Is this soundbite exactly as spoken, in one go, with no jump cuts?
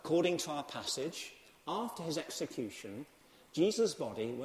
yes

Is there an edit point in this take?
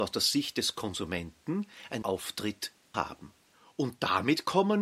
yes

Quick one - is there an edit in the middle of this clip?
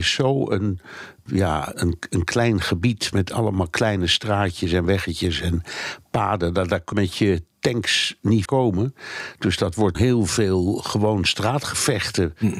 yes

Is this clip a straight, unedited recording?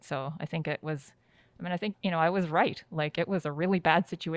no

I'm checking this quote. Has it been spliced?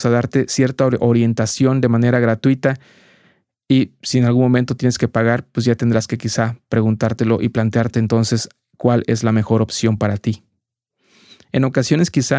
no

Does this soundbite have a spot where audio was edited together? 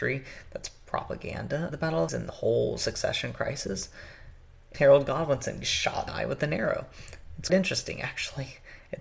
yes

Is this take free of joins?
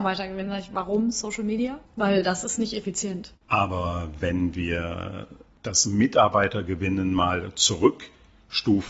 no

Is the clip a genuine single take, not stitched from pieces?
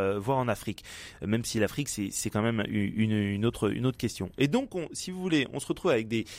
yes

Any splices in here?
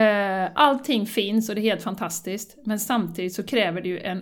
no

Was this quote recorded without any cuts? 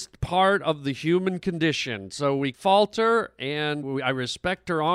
no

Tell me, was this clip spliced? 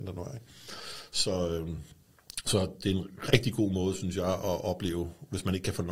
no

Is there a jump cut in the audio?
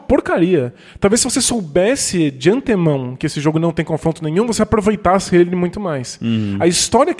no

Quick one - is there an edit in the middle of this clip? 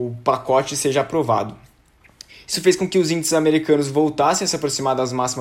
no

